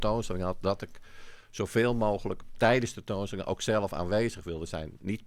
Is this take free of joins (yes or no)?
yes